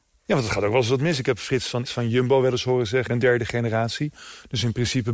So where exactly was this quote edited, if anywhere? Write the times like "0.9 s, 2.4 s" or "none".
1.8 s, 3.1 s